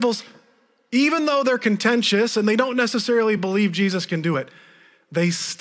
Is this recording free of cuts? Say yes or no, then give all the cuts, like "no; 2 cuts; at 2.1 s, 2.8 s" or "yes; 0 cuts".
yes; 0 cuts